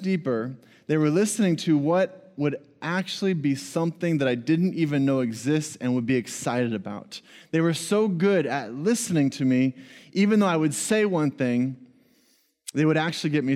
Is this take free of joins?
yes; 0 cuts

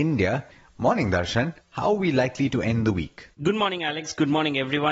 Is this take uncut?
no; 2 cuts; at 1.6 s, 3.3 s

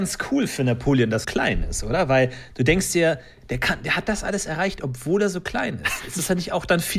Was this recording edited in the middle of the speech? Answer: yes; 1 cut; at 1.2 s

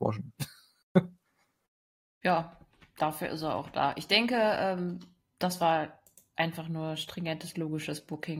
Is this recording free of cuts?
yes; 0 cuts

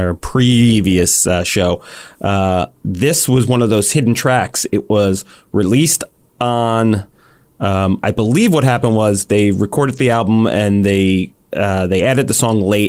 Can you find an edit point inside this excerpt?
no; 0 cuts

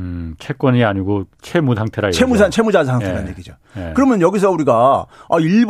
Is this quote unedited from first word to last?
no; 1 cut; at 1.3 s

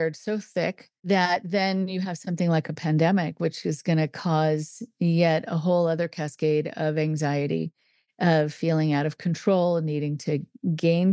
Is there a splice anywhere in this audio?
no; 0 cuts

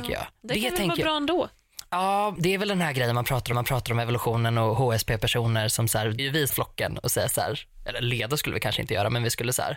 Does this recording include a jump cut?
yes; 4 cuts; at 2.4 s, 3.5 s, 6.2 s, 6.5 s

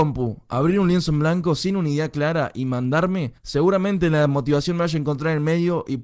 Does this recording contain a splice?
yes; 1 cut; at 3.4 s

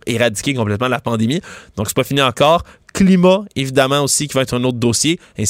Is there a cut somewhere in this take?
no; 0 cuts

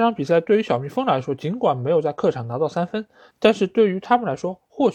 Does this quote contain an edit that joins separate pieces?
no; 0 cuts

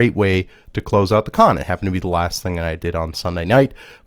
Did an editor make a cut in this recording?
no; 0 cuts

